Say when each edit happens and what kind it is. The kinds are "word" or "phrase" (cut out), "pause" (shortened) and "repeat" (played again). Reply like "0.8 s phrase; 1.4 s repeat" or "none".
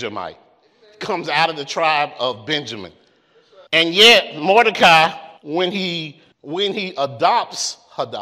3.7 s pause; 5.4 s pause; 6.3 s pause